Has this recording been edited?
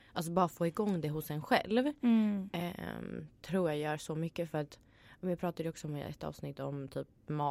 no; 0 cuts

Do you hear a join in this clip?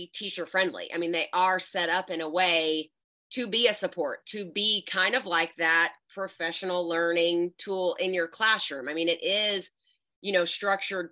no; 0 cuts

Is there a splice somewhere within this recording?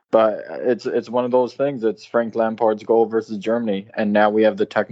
no; 0 cuts

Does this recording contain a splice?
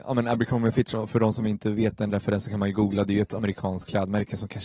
no; 0 cuts

